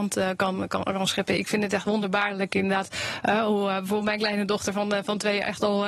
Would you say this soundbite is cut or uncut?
uncut